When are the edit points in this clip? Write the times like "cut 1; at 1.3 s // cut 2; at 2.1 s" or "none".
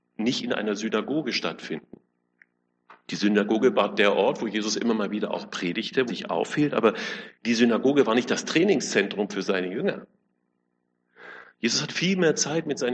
cut 1; at 6.1 s // cut 2; at 7.3 s // cut 3; at 11.5 s